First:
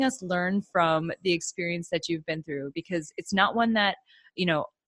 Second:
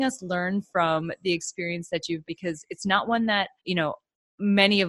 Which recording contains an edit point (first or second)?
second